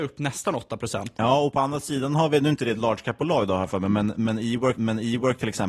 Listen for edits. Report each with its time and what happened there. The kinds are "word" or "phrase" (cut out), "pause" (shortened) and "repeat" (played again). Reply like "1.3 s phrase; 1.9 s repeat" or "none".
4.8 s repeat